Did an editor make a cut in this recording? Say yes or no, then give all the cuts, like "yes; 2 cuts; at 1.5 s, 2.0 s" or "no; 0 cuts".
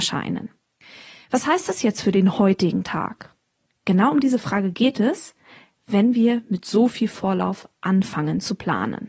no; 0 cuts